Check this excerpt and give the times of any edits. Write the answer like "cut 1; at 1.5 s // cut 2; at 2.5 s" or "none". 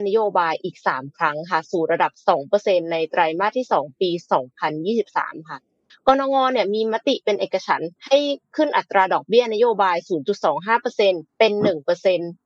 cut 1; at 5.9 s // cut 2; at 8.0 s // cut 3; at 11.3 s